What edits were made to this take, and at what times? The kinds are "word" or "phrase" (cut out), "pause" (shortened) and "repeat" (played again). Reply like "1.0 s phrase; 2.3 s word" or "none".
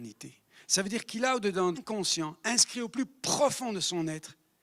1.7 s phrase